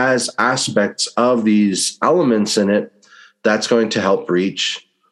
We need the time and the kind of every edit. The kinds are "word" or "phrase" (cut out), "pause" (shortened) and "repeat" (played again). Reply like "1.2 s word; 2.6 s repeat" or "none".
none